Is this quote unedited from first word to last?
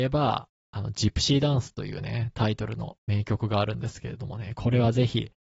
yes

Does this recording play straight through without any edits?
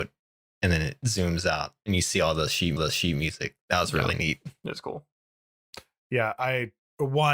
no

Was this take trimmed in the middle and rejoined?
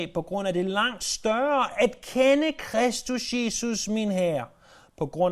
no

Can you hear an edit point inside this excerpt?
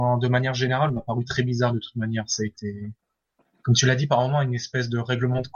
no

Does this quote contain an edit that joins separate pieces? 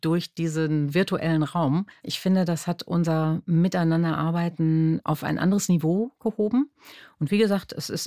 yes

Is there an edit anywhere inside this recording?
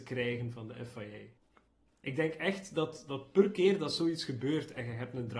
no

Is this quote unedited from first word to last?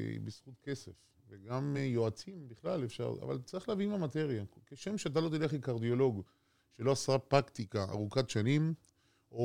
yes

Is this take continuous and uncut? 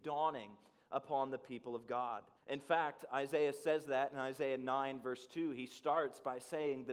no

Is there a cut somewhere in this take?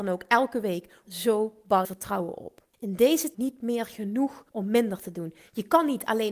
yes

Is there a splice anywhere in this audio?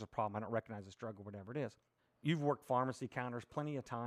yes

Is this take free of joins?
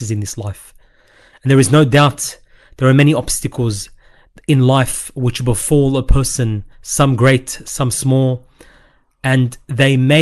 no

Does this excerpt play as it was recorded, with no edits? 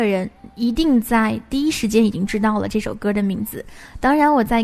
yes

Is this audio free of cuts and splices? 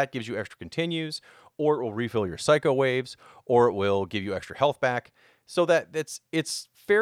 yes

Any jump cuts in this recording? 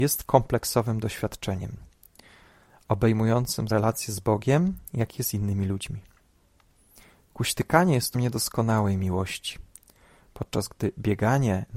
yes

